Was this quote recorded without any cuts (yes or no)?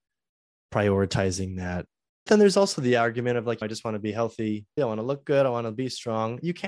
no